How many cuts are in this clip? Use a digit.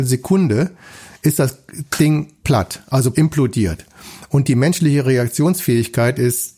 2